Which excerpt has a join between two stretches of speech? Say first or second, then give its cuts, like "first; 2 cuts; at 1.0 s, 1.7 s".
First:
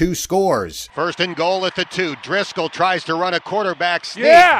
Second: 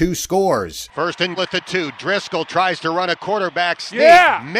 second; 1 cut; at 1.4 s